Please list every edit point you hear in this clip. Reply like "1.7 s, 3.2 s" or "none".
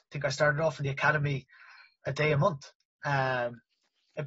none

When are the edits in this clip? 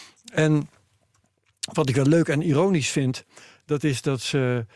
none

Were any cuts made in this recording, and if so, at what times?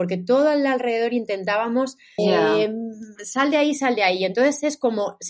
2.2 s

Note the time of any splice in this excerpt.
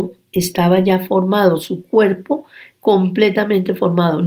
none

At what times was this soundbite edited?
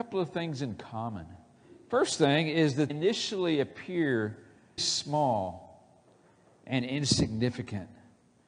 2.9 s, 4.8 s

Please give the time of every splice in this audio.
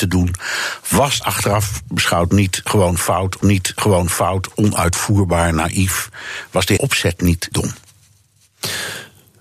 1.2 s, 3.4 s, 6.8 s, 7.5 s

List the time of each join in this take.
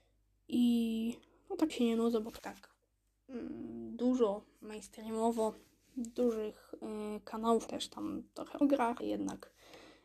1.7 s, 2.4 s, 7.7 s, 8.6 s, 9.0 s

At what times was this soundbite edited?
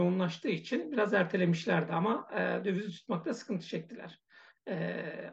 none

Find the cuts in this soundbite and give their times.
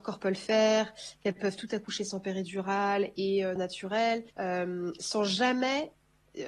3.6 s, 4.3 s

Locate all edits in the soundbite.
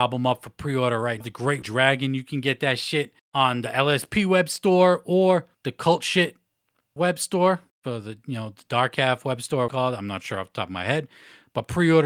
1.2 s, 1.6 s, 3.2 s, 5.5 s, 7.0 s, 7.7 s, 9.7 s

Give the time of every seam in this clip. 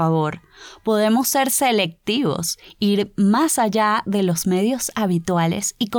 none

